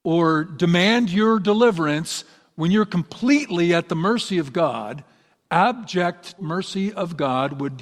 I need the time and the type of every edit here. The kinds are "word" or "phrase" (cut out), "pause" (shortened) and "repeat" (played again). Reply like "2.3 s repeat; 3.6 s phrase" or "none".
6.4 s word